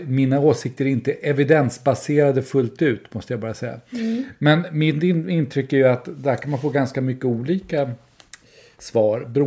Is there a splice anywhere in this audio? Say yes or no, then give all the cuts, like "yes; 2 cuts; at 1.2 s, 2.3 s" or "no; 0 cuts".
no; 0 cuts